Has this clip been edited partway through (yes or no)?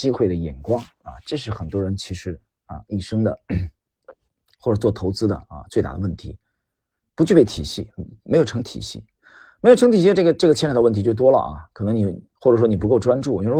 no